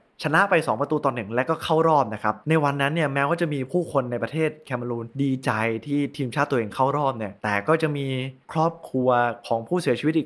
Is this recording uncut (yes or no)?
no